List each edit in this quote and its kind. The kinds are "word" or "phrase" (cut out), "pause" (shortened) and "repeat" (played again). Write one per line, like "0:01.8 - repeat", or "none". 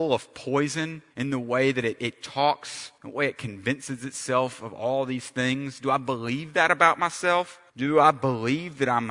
0:01.1 - pause
0:03.0 - pause
0:07.7 - pause

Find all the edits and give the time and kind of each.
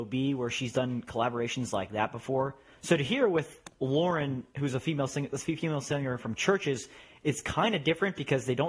none

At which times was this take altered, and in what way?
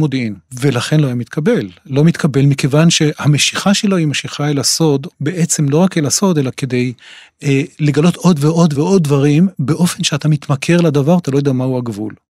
0:08.8 - word

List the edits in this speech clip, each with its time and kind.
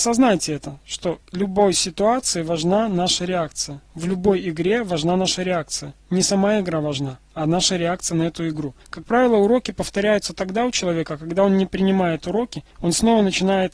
0:01.2 - pause
0:03.8 - pause
0:08.8 - pause
0:12.7 - pause

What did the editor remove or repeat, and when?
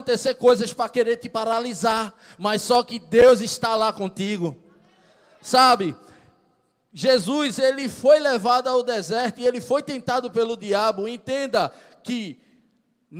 none

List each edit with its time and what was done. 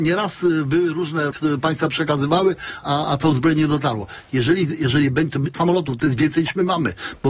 0:01.3 - word
0:02.8 - word
0:05.5 - phrase

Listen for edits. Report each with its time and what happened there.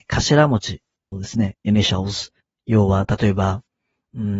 0:01.1 - word
0:02.4 - pause

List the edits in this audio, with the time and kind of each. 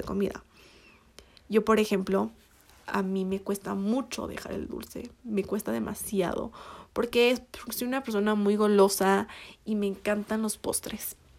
none

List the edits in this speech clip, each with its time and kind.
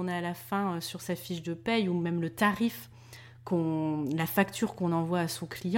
none

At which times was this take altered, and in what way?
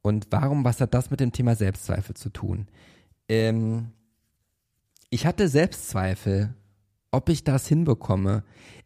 none

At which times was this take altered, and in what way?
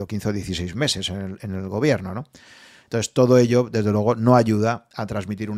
none

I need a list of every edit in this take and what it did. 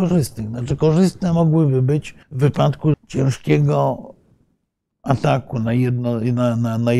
0:02.2 - pause
0:02.9 - word

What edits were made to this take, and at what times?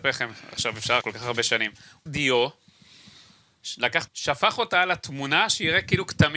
0:01.0 - word
0:02.1 - word
0:04.1 - word

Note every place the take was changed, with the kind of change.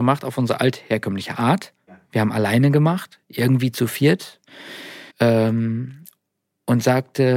0:01.9 - pause
0:05.1 - pause

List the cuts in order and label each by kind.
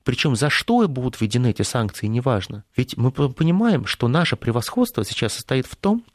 0:02.7 - pause

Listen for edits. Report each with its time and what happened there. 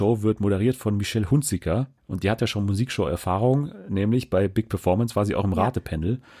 0:02.0 - pause

